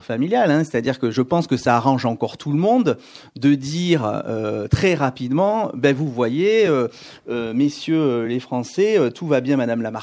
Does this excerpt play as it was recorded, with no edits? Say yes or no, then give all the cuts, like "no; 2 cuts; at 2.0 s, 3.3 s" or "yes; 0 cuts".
yes; 0 cuts